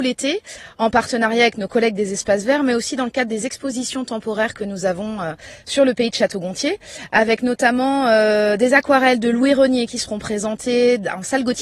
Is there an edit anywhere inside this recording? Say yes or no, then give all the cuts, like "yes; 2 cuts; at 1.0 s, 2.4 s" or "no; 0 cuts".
no; 0 cuts